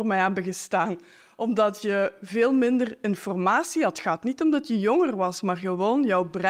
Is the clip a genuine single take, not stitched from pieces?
yes; 0 cuts

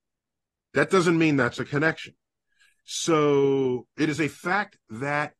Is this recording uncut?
yes; 0 cuts

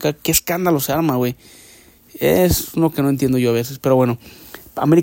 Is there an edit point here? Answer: no; 0 cuts

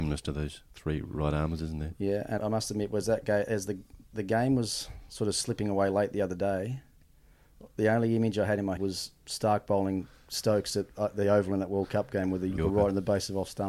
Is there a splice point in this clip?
yes; 4 cuts; at 2.4 s, 4.0 s, 8.8 s, 12.6 s

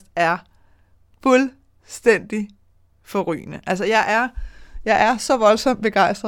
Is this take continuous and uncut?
yes; 0 cuts

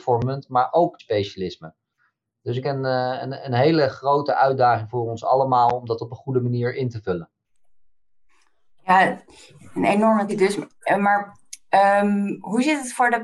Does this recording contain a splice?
yes; 3 cuts; at 1.0 s, 2.6 s, 10.3 s

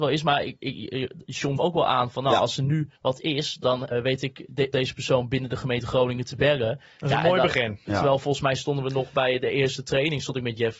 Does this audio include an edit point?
yes; 4 cuts; at 1.6 s, 3.0 s, 3.9 s, 4.7 s

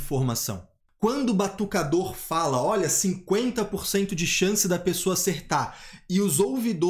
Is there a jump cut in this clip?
no; 0 cuts

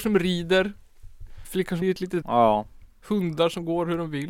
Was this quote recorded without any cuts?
no; 3 cuts; at 1.4 s, 1.8 s, 2.2 s

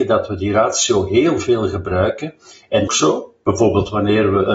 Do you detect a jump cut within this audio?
yes; 1 cut; at 2.9 s

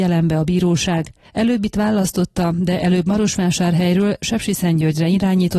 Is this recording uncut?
yes; 0 cuts

